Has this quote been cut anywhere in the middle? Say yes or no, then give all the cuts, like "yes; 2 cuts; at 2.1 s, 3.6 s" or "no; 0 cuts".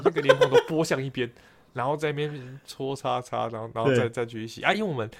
no; 0 cuts